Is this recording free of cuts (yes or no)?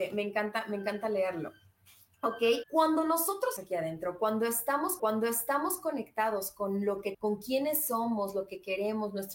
no